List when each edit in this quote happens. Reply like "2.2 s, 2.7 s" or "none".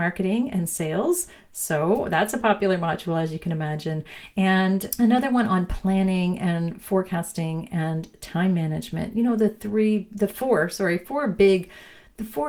none